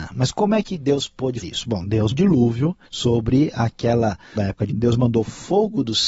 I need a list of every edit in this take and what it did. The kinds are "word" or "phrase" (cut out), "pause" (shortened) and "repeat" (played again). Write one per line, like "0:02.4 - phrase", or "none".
0:01.4 - word
0:02.1 - word
0:02.9 - pause
0:04.4 - word
0:04.7 - word